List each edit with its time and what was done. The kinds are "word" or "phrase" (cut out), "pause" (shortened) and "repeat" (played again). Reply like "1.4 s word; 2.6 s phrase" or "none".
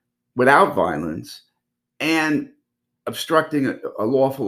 none